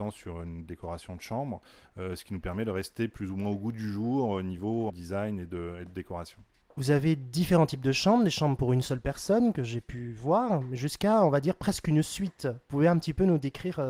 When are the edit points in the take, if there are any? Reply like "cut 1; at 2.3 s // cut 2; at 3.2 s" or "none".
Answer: cut 1; at 4.9 s

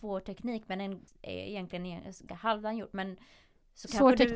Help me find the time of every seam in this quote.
cut 1; at 1.1 s // cut 2; at 2.3 s

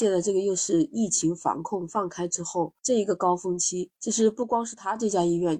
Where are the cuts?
cut 1; at 2.8 s // cut 2; at 4.0 s

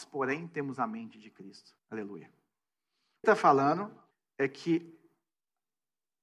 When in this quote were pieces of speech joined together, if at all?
cut 1; at 1.8 s // cut 2; at 3.2 s // cut 3; at 4.1 s

